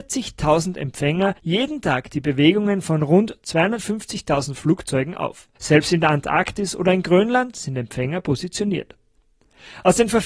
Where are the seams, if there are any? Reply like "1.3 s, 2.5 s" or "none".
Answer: 1.4 s, 5.5 s